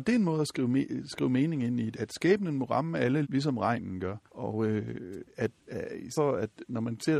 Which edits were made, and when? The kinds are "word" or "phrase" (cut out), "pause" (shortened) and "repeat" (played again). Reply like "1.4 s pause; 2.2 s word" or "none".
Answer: 1.9 s word; 3.2 s word; 4.3 s pause; 5.6 s pause; 6.1 s word